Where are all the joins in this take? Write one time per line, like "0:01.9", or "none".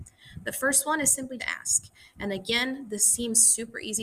0:01.4